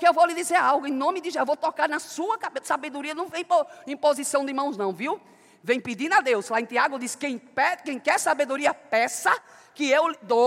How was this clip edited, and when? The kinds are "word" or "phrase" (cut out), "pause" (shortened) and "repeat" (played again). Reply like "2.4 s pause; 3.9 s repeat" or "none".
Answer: none